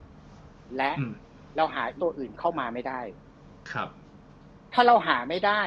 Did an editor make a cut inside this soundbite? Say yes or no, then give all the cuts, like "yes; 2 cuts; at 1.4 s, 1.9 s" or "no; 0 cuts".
yes; 1 cut; at 2.0 s